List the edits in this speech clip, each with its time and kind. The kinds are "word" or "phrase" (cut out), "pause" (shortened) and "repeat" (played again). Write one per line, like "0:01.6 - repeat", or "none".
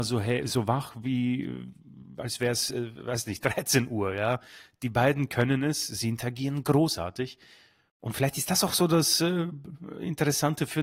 none

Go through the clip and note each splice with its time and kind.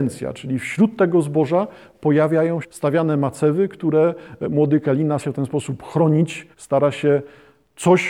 0:02.6 - word
0:05.2 - word
0:06.5 - pause

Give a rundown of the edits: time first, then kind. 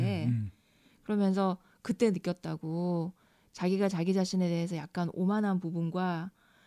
none

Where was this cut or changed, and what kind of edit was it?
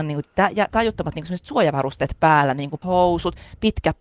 0:02.8 - word

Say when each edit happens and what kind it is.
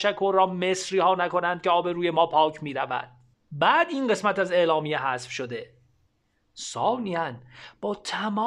none

